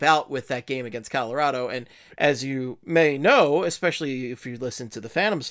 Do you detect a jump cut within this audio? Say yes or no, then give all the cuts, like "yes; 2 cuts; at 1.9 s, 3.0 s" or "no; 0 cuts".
no; 0 cuts